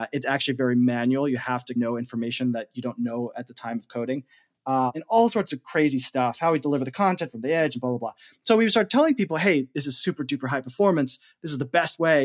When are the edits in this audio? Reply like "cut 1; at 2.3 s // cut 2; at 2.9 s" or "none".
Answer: none